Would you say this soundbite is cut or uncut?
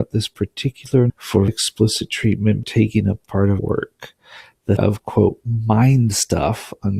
cut